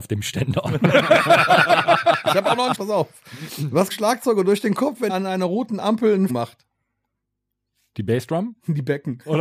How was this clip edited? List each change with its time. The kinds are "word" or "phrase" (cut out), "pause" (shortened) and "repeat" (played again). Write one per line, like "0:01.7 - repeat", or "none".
0:02.7 - word
0:03.9 - phrase
0:05.1 - word
0:06.3 - word